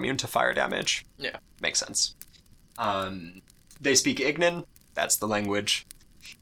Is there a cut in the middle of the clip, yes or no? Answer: no